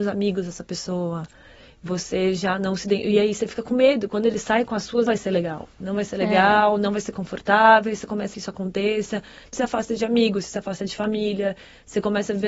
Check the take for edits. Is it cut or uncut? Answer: cut